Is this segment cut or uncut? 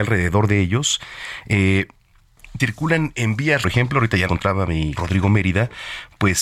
cut